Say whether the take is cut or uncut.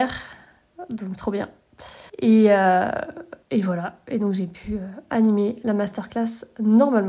cut